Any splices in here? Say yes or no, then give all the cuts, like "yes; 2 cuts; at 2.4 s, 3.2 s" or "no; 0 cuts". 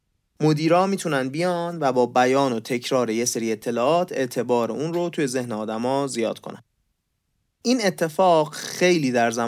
no; 0 cuts